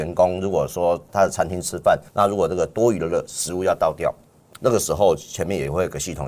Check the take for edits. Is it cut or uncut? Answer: cut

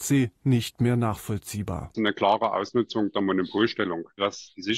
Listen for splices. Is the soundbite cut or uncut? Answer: cut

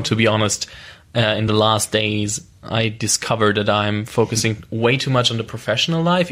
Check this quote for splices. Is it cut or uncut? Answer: uncut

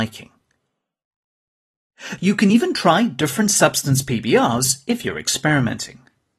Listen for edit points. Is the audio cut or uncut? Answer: uncut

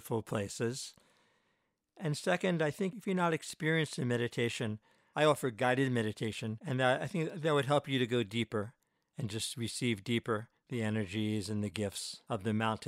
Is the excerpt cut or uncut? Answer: uncut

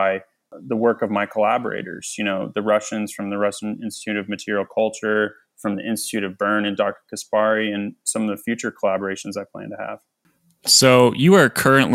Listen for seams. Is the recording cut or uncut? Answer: uncut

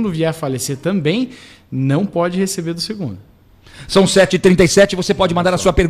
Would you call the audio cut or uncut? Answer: uncut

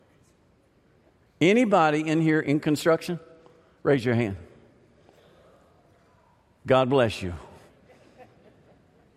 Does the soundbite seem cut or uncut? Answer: uncut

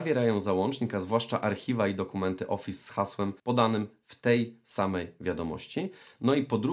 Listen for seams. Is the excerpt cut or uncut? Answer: cut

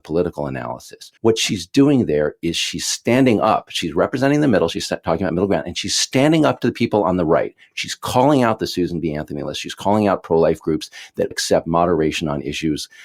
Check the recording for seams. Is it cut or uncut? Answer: cut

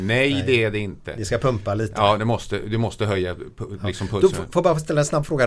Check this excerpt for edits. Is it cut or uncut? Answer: uncut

